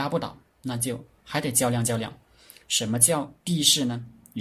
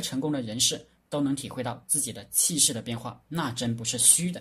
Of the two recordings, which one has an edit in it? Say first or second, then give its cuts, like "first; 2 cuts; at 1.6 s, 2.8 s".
first; 2 cuts; at 1.1 s, 3.4 s